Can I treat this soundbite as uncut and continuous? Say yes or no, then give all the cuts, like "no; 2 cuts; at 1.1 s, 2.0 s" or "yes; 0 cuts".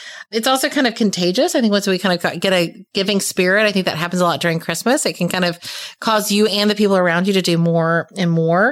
yes; 0 cuts